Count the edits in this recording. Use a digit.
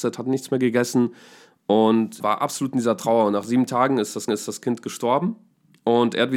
2